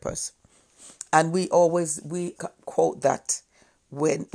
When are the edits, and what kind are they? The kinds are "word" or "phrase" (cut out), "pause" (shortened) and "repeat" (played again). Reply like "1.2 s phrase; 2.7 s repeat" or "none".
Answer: 2.4 s word